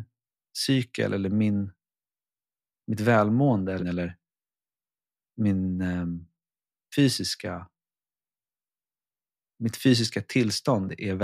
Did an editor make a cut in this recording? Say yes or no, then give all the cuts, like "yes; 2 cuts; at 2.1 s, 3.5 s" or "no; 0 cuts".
yes; 1 cut; at 3.8 s